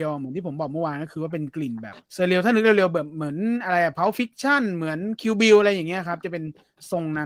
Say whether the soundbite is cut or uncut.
cut